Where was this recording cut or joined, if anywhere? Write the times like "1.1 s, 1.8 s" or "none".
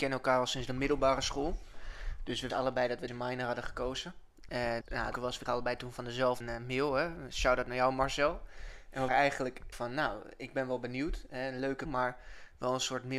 2.5 s, 3.1 s, 4.8 s, 5.1 s, 5.5 s, 6.4 s, 9.1 s, 9.7 s, 11.9 s